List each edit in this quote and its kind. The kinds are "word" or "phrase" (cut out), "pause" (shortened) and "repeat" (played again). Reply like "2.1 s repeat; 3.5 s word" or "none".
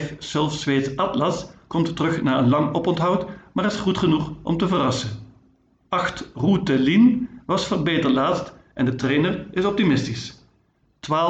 none

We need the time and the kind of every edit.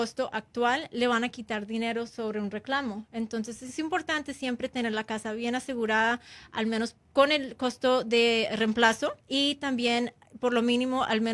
9.2 s pause

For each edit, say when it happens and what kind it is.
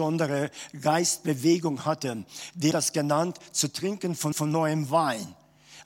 2.7 s word; 4.3 s repeat

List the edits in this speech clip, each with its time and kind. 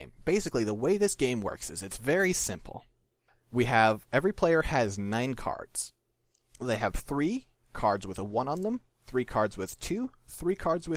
none

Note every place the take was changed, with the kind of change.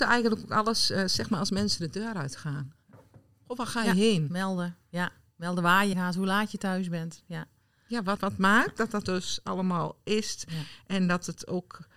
5.9 s word; 8.2 s word; 9.1 s word

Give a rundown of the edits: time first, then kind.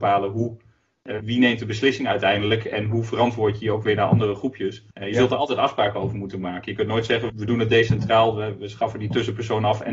1.2 s word; 4.9 s pause; 7.3 s word

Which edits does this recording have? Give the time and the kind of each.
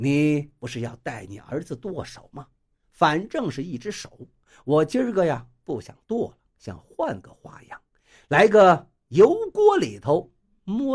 none

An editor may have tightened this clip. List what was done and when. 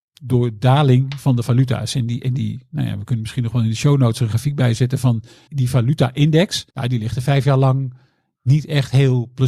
5.5 s word; 6.7 s pause

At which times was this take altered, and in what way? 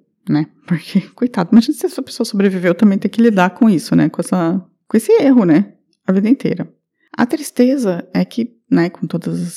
none

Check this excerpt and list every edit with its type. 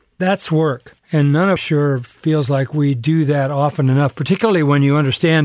1.6 s phrase

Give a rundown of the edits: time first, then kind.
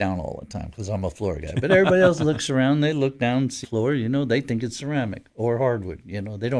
3.6 s word

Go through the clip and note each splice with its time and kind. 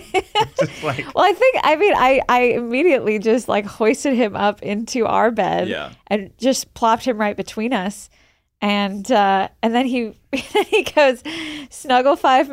none

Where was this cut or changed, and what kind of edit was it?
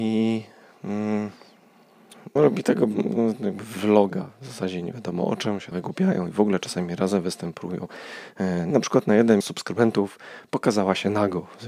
2.4 s word; 5.7 s word; 8.7 s word; 9.4 s word

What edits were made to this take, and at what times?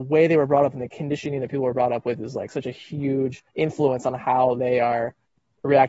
3.5 s pause

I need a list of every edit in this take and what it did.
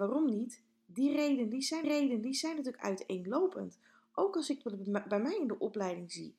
1.8 s repeat

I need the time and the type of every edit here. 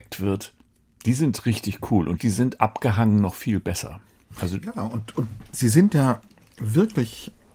none

